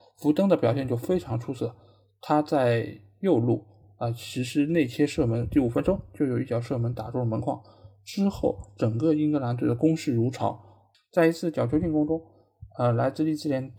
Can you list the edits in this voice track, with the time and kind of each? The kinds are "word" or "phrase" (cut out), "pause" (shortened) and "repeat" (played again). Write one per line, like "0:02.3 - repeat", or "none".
none